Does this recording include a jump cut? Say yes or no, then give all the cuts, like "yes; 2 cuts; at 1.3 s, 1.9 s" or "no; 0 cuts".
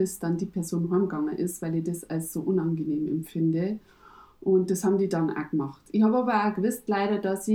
no; 0 cuts